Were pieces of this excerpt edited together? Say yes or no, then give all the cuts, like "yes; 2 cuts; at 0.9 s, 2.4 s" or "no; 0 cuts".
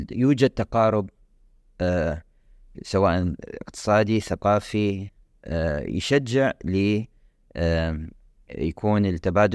no; 0 cuts